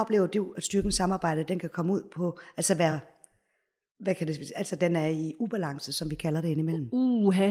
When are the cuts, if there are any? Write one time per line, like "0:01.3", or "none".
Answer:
none

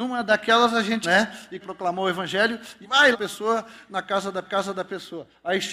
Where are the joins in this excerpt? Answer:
0:01.0
0:01.6
0:02.8
0:03.1
0:04.4

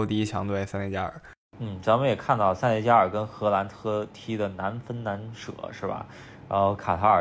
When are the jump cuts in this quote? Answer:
none

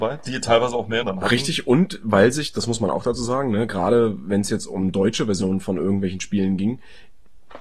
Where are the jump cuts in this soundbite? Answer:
0:01.0

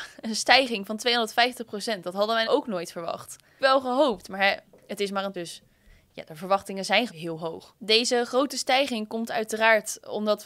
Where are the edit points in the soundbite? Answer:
0:02.4
0:03.6
0:05.3
0:07.1

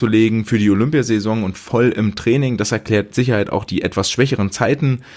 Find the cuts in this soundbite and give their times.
0:03.1
0:03.7

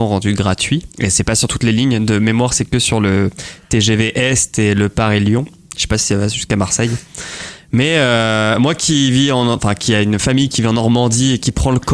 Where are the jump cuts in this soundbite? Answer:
0:00.9

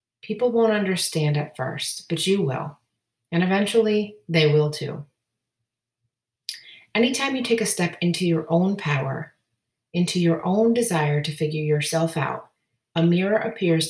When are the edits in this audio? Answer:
none

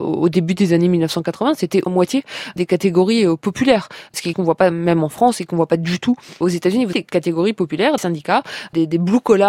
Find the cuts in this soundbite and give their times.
0:01.9
0:04.3
0:06.4
0:06.9
0:08.0

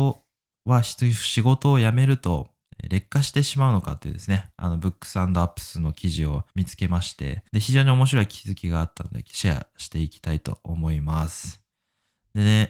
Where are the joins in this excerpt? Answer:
0:06.5
0:07.5

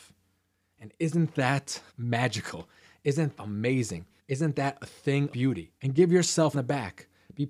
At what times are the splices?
0:01.9
0:03.4
0:04.2
0:05.3
0:05.8
0:06.5

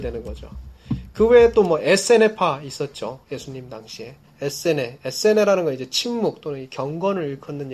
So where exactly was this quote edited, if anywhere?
0:04.2

